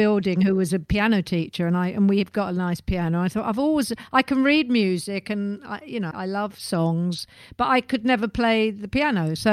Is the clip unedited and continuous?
no; 1 cut; at 6.1 s

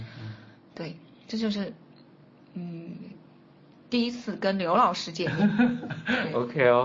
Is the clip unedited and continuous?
yes; 0 cuts

